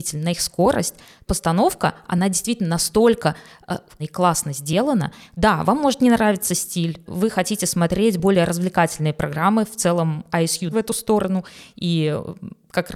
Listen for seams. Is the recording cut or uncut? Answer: cut